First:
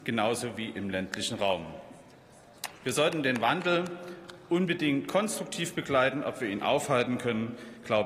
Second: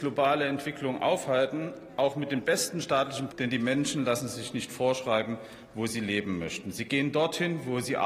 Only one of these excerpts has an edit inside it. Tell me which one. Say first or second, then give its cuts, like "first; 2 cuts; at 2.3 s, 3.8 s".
second; 1 cut; at 3.3 s